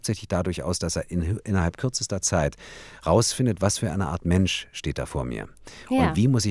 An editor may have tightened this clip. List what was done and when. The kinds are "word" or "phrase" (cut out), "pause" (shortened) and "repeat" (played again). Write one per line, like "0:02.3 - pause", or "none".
none

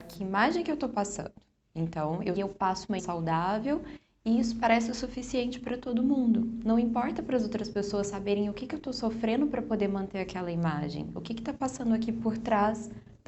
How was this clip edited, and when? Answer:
0:02.4 - phrase
0:03.0 - phrase

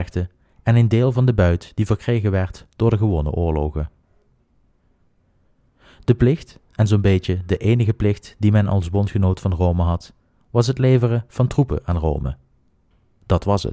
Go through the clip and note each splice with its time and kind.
none

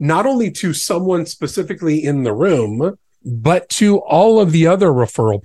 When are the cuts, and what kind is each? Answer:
0:03.2 - word

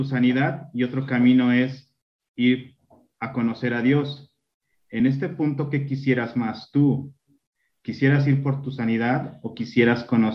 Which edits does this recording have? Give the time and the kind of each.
none

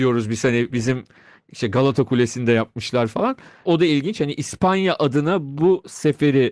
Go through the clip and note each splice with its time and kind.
none

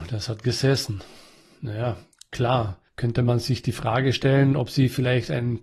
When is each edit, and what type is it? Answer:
0:02.9 - pause

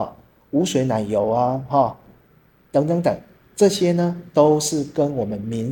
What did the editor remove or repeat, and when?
none

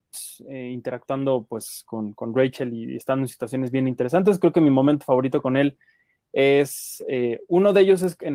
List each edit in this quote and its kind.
none

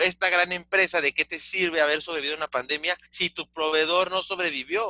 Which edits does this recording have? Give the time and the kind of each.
0:03.0 - pause

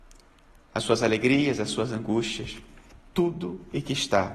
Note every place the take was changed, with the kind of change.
none

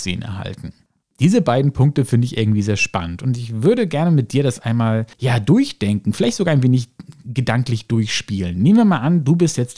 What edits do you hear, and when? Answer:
0:01.0 - pause
0:05.1 - pause

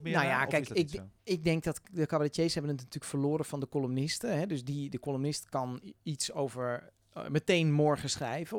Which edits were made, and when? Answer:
0:01.2 - pause

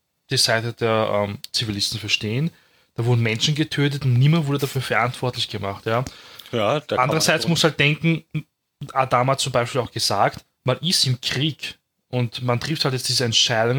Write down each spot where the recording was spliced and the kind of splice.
none

